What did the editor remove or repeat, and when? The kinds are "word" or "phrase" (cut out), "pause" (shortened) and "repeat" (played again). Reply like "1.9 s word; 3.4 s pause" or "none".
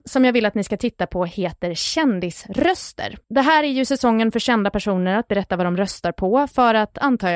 3.2 s pause